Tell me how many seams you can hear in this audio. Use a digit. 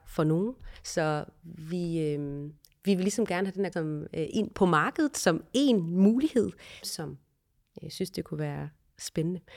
3